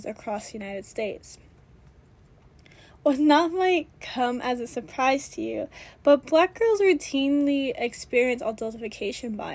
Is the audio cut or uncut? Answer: uncut